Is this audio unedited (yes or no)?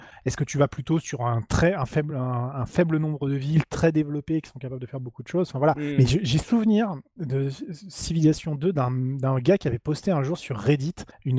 yes